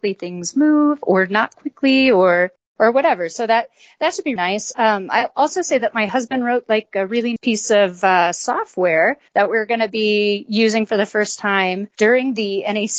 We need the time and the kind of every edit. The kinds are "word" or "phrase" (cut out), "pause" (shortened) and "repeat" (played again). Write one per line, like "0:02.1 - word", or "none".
0:04.4 - word
0:07.4 - word
0:09.3 - pause